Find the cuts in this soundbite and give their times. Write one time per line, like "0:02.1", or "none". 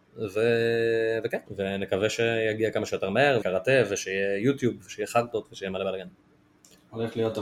0:01.5
0:03.4